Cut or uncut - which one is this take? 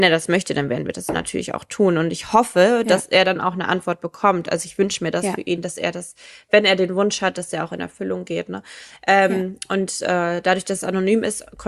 uncut